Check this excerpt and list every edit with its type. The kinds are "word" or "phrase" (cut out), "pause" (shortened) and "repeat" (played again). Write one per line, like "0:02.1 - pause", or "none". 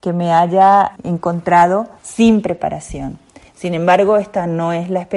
0:01.0 - word
0:02.0 - pause
0:03.5 - pause